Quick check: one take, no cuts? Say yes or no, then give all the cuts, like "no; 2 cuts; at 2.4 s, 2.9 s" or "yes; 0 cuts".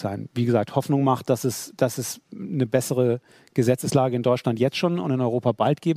yes; 0 cuts